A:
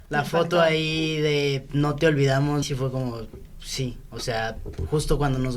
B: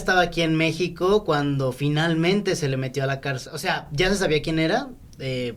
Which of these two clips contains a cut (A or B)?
A